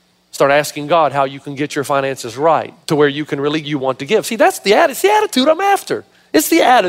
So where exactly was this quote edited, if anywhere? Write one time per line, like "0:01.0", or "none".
0:02.8
0:03.6